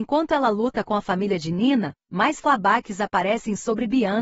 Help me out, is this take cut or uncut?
uncut